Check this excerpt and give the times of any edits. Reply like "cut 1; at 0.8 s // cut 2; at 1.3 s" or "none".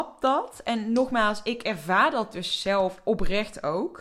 none